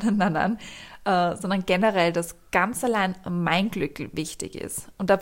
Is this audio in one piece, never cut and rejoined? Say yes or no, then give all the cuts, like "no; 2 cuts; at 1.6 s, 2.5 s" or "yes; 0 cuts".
yes; 0 cuts